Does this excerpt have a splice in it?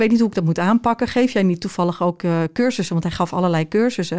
no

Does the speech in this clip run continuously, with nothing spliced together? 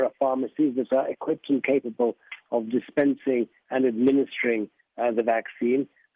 yes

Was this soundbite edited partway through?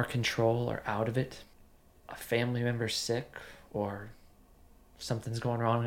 no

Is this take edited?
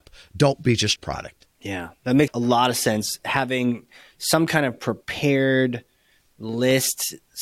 yes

